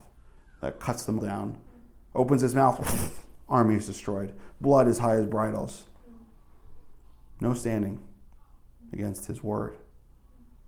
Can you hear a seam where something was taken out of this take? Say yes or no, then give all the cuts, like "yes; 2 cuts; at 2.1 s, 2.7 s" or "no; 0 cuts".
yes; 1 cut; at 1.2 s